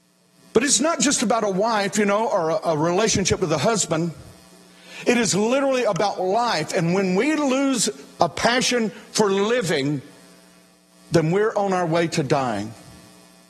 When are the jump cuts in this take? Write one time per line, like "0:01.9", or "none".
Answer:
none